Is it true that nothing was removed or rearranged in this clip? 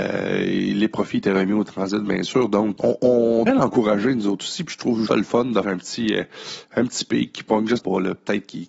no; 5 cuts; at 2.8 s, 3.5 s, 5.1 s, 5.6 s, 7.8 s

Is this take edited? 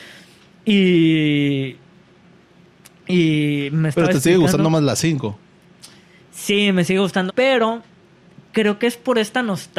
yes; 1 cut; at 7.3 s

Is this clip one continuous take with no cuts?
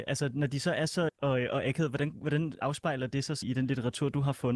no; 3 cuts; at 1.1 s, 2.6 s, 3.4 s

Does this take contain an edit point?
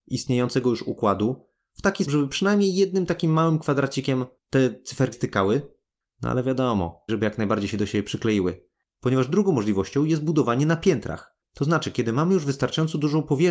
yes; 3 cuts; at 2.1 s, 5.1 s, 7.1 s

